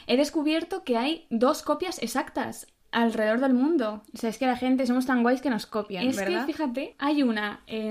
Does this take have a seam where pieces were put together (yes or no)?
no